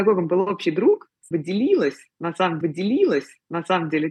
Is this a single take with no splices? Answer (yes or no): no